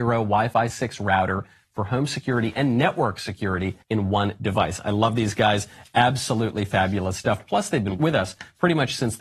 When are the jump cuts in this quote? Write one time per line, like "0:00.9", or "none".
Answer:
0:03.8